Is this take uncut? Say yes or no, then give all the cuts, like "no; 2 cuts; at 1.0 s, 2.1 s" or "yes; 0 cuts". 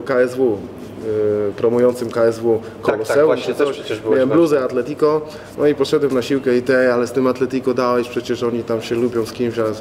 yes; 0 cuts